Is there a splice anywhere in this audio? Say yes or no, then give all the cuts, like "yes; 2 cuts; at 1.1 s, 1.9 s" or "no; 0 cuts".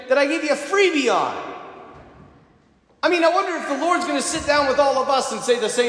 no; 0 cuts